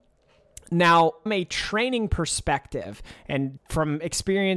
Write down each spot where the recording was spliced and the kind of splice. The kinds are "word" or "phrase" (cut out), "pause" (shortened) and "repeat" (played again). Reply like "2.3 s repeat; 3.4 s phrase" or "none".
1.3 s word; 3.6 s word